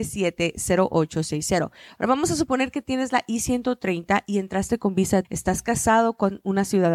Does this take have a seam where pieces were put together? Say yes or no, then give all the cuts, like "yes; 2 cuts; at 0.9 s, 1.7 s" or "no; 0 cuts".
yes; 1 cut; at 5.2 s